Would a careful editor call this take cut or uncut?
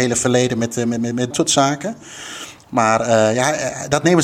cut